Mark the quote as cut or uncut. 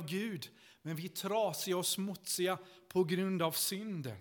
uncut